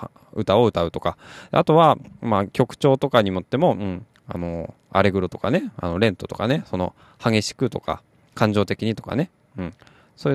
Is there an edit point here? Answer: no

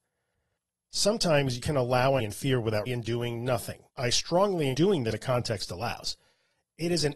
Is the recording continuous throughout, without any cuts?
no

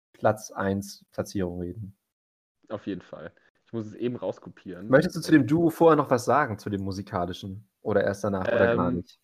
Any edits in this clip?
no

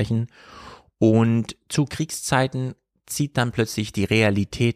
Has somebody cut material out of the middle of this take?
no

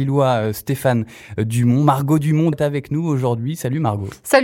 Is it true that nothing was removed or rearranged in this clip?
no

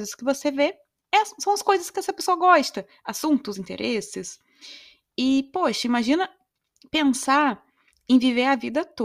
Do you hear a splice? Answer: yes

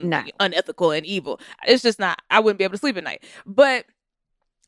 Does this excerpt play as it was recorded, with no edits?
yes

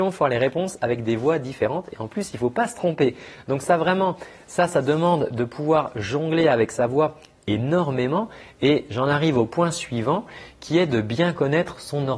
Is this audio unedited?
yes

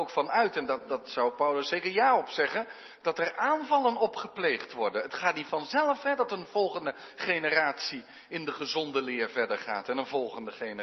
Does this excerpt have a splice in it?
no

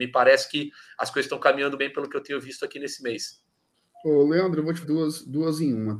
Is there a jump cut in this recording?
yes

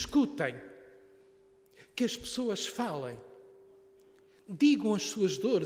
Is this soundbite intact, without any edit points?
yes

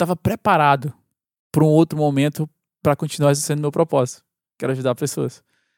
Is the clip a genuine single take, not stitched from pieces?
yes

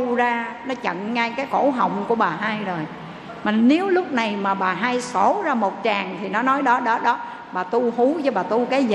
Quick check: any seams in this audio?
no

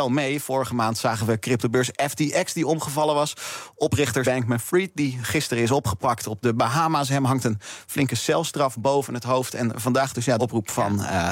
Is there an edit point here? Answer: yes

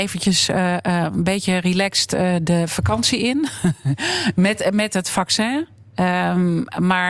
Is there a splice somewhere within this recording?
no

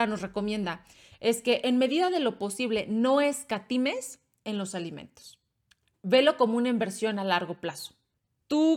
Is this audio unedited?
yes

